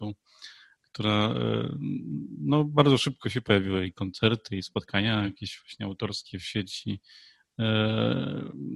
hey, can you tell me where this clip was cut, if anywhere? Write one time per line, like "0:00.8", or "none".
none